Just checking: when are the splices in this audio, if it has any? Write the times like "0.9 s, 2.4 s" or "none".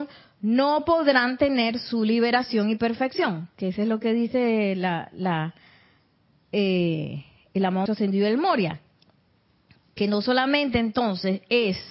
7.9 s